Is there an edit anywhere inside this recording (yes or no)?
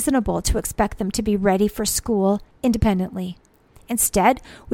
no